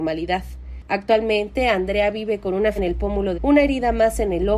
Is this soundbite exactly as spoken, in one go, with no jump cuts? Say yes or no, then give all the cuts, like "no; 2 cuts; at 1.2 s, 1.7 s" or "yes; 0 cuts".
no; 2 cuts; at 2.8 s, 3.3 s